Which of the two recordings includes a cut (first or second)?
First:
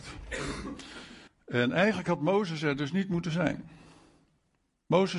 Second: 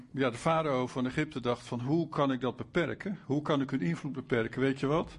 first